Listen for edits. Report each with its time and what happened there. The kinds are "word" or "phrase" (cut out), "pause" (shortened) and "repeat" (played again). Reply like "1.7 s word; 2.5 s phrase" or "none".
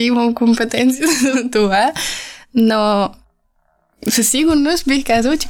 1.3 s word

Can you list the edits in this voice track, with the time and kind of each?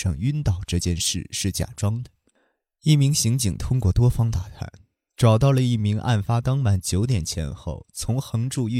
none

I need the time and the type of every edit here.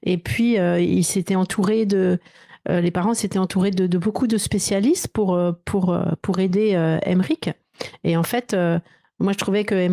none

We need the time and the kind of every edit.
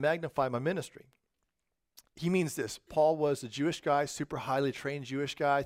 2.1 s pause

